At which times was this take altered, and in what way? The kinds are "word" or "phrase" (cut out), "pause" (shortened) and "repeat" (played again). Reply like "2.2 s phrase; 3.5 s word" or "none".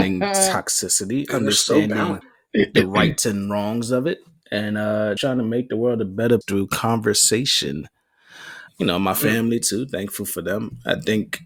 2.2 s word; 5.2 s word; 6.4 s word; 8.7 s word